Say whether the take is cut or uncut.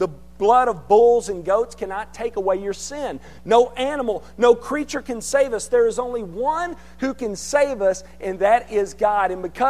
uncut